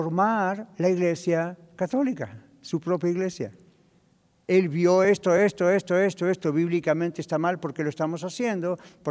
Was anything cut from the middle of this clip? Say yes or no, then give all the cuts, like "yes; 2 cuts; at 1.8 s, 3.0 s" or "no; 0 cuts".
no; 0 cuts